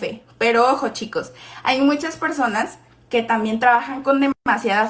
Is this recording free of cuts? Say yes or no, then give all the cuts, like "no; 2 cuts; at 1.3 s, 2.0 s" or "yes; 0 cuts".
yes; 0 cuts